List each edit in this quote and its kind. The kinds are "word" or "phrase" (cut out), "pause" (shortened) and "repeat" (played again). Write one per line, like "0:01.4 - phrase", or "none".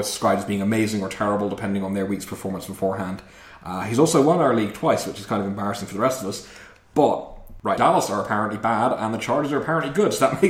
0:07.8 - word